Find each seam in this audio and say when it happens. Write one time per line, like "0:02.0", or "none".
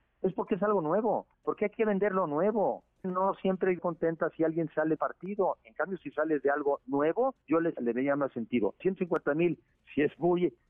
0:01.3
0:03.0
0:03.8
0:05.0
0:07.4
0:07.8
0:08.8
0:09.7